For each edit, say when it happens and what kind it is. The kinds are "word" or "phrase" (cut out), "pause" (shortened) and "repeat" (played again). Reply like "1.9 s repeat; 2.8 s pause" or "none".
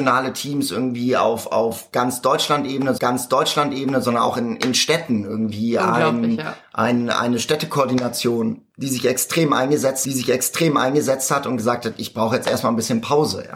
3.0 s repeat; 8.7 s pause; 10.0 s repeat